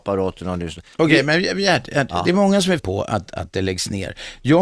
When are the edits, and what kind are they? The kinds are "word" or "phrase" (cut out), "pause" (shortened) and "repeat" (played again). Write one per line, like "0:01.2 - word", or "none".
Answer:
0:02.8 - word
0:03.3 - word